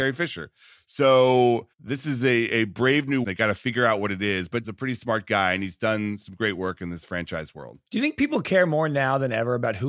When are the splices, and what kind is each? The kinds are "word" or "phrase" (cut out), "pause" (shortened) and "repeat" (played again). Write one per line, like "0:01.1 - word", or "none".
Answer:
0:01.7 - pause
0:03.2 - phrase
0:04.6 - phrase